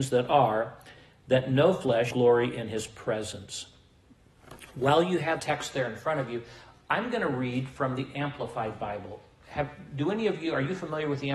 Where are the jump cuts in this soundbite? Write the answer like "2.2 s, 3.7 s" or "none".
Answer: 2.1 s, 5.4 s